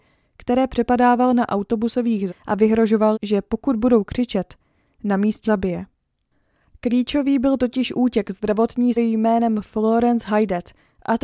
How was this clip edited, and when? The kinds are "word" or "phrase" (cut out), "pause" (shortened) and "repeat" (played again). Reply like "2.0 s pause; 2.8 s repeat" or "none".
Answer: 2.3 s word; 3.1 s word; 5.5 s word; 9.0 s word